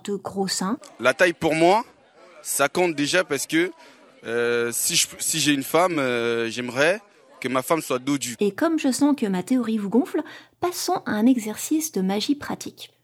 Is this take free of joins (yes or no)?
yes